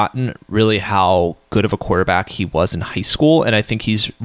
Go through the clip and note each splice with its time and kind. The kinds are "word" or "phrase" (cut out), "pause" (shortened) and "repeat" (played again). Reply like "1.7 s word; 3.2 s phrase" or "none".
none